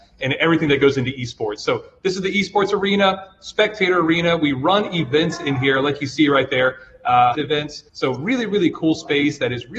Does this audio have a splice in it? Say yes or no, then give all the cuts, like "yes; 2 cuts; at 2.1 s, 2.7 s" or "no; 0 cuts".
yes; 2 cuts; at 7.3 s, 7.9 s